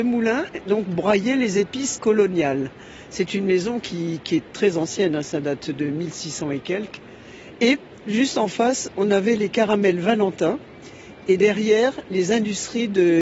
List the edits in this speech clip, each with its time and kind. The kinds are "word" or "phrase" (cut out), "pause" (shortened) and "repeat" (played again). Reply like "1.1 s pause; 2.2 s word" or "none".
2.0 s word